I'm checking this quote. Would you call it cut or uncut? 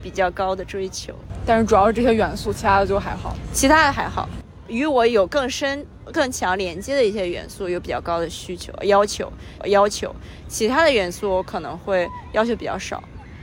cut